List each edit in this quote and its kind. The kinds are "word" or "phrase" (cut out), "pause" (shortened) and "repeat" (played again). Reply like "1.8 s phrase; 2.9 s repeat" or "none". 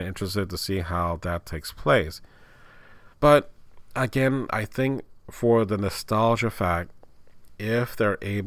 3.1 s pause